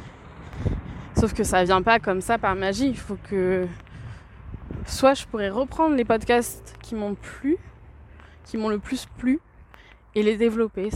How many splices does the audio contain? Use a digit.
0